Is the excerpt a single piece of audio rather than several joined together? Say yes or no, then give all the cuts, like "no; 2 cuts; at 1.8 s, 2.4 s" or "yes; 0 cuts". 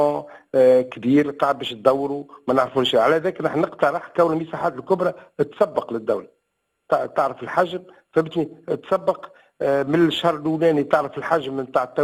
yes; 0 cuts